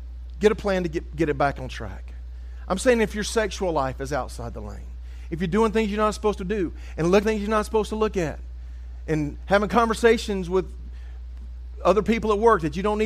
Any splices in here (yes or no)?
yes